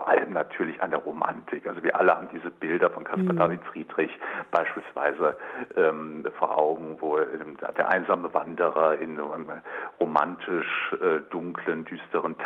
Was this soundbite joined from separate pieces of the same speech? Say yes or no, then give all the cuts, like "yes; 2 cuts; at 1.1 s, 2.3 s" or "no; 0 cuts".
no; 0 cuts